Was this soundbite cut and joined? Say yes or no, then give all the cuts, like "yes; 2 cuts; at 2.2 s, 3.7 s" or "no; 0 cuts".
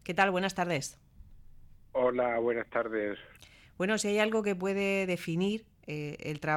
no; 0 cuts